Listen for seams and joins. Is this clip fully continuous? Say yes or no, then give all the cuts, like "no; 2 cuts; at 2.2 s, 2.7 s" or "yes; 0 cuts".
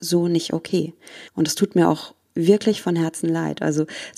no; 2 cuts; at 1.3 s, 2.2 s